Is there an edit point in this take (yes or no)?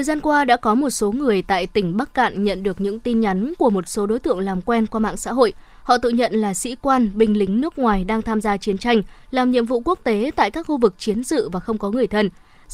no